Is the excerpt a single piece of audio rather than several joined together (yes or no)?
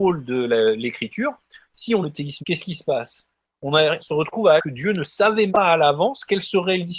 no